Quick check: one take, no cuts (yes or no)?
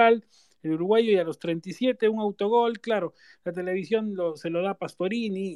yes